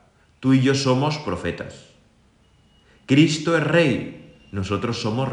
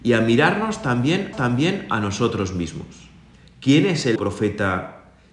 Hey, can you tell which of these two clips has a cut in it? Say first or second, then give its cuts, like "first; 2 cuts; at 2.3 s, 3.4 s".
second; 3 cuts; at 1.3 s, 3.3 s, 4.2 s